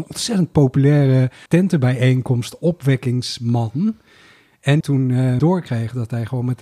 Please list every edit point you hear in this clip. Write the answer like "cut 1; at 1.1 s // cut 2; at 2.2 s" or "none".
cut 1; at 1.5 s // cut 2; at 4.8 s // cut 3; at 5.4 s